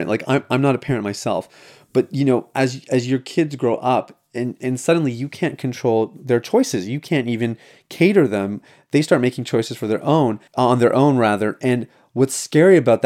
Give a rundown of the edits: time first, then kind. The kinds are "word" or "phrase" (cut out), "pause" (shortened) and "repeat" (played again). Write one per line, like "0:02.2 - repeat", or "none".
0:10.5 - pause

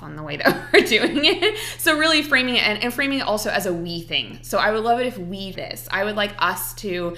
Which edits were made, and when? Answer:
0:05.5 - word

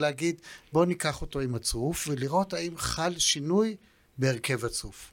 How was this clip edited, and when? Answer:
none

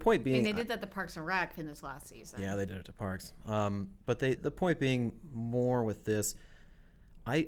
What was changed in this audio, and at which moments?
0:02.7 - word
0:04.4 - word

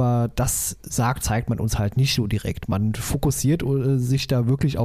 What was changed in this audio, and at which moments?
0:01.2 - word

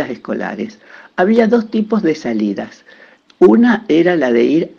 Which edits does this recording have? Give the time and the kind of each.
none

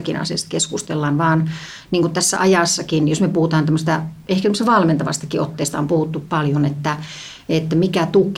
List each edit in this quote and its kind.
none

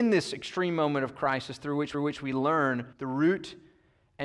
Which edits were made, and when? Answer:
0:01.9 - repeat
0:02.9 - pause

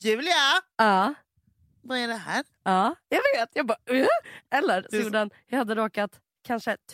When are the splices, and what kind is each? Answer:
none

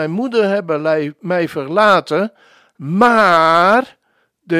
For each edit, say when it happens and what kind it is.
none

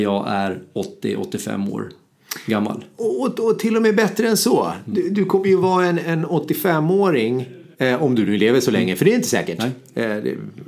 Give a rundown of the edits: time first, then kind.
0:06.0 - word
0:07.7 - pause

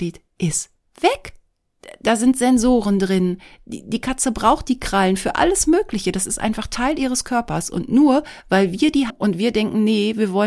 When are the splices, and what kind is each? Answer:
0:09.1 - word

